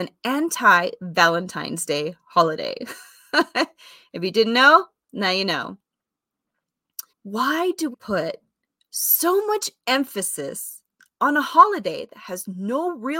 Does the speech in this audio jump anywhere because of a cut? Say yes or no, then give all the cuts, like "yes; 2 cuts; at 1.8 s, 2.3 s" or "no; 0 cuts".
yes; 2 cuts; at 7.1 s, 7.9 s